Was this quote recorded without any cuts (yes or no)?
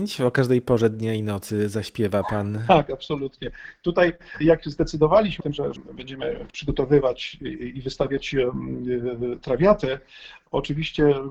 no